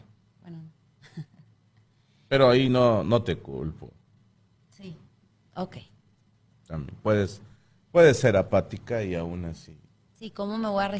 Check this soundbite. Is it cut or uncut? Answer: uncut